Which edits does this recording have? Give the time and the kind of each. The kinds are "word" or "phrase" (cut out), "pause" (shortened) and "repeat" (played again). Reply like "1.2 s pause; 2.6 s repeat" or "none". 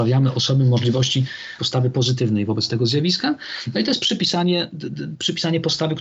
1.6 s word